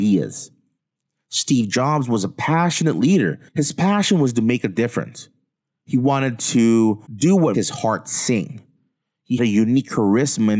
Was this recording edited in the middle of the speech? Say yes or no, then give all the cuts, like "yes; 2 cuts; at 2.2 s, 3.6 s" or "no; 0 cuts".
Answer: yes; 4 cuts; at 3.5 s, 7.1 s, 7.5 s, 9.4 s